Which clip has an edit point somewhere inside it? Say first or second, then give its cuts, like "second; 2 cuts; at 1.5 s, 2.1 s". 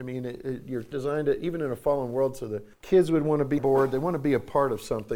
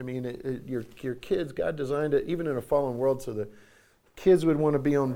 first; 3 cuts; at 0.9 s, 2.7 s, 3.6 s